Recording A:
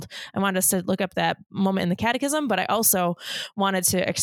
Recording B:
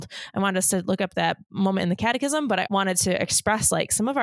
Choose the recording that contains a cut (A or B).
B